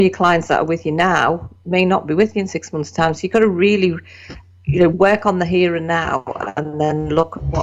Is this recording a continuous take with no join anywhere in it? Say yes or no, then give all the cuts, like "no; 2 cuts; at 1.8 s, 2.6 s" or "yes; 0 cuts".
no; 1 cut; at 4.9 s